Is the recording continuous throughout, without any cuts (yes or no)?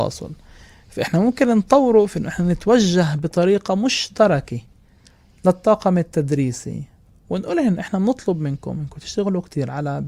yes